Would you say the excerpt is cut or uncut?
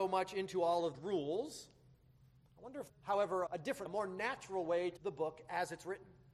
cut